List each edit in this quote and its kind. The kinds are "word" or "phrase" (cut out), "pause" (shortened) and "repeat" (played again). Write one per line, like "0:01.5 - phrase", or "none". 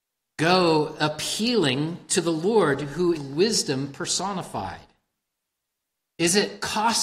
0:03.2 - word